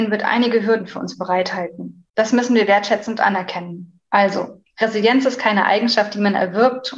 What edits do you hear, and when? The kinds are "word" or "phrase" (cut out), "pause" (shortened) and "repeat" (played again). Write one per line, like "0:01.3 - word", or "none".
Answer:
0:02.1 - pause
0:04.0 - pause

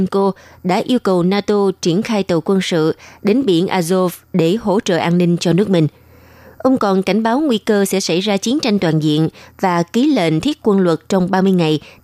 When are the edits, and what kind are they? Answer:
none

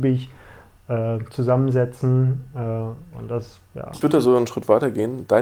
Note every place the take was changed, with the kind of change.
0:03.1 - word
0:04.0 - word

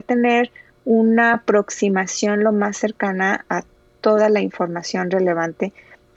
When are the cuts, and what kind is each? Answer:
none

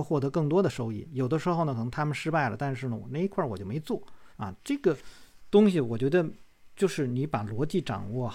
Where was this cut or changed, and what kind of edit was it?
0:04.3 - pause

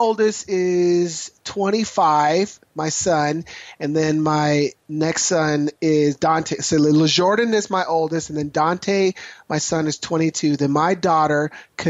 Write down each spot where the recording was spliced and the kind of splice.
none

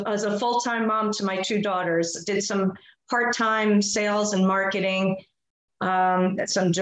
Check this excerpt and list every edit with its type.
none

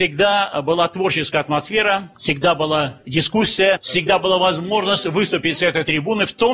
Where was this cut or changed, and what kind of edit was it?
none

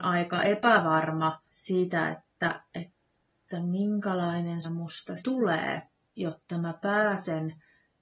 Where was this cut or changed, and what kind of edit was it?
0:01.5 - pause
0:02.7 - pause
0:04.6 - word
0:05.2 - word
0:05.9 - pause

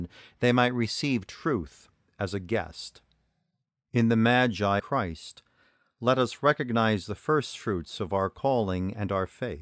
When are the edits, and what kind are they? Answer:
0:04.8 - word

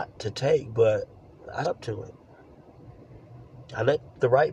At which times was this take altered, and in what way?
0:01.6 - word

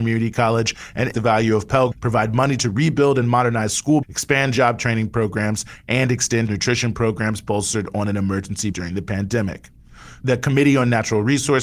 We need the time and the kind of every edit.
0:01.1 - word
0:01.9 - word
0:04.0 - word
0:06.5 - word
0:08.7 - word

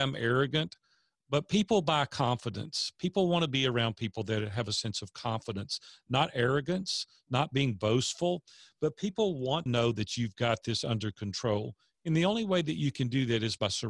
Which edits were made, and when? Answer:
0:09.7 - word

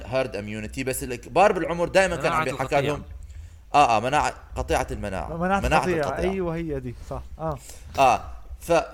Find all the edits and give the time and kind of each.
none

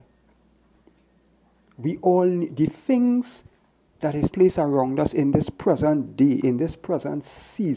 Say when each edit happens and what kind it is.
0:04.3 - word

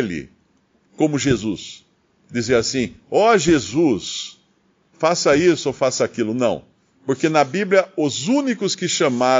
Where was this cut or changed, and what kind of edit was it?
none

